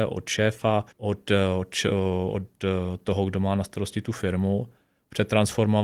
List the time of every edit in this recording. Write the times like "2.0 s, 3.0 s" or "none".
0.9 s